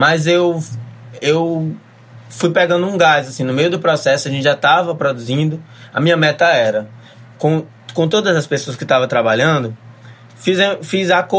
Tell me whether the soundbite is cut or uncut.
uncut